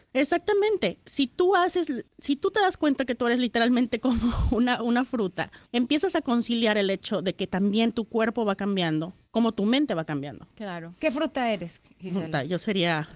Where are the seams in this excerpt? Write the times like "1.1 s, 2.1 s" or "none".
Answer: 2.1 s, 5.7 s